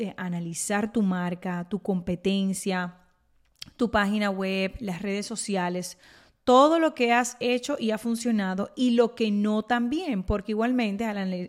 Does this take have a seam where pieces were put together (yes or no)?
no